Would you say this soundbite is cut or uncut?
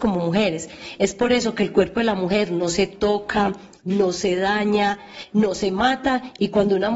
uncut